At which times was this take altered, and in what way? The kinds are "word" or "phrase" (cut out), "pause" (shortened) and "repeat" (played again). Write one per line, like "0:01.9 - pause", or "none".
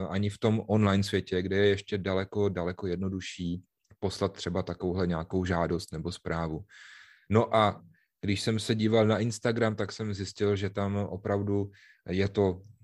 none

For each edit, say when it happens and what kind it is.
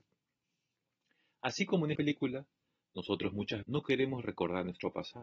0:01.9 - word
0:03.6 - word

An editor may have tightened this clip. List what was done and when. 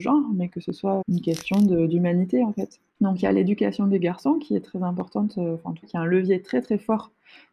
0:01.0 - word
0:02.9 - pause
0:05.8 - word

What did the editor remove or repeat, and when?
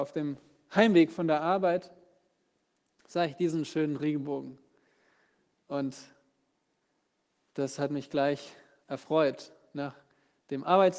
none

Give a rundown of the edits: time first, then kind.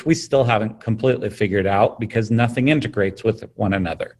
none

